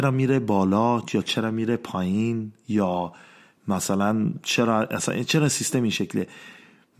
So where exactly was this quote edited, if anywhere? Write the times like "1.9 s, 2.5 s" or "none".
none